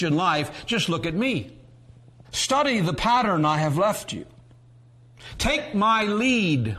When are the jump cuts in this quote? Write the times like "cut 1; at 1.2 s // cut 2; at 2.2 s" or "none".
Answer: cut 1; at 2.2 s